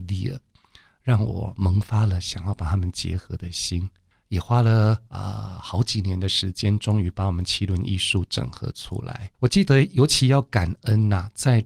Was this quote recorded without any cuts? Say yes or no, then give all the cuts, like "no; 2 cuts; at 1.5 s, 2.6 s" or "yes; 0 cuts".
no; 2 cuts; at 5.1 s, 9.3 s